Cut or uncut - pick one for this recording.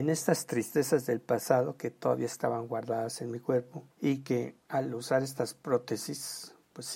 cut